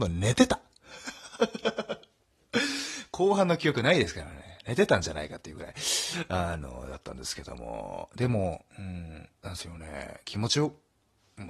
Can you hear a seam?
yes; 2 cuts; at 8.7 s, 9.4 s

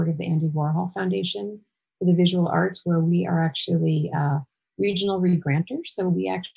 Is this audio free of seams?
yes; 0 cuts

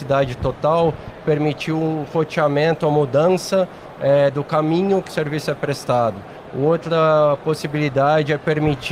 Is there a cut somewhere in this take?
yes; 1 cut; at 5.1 s

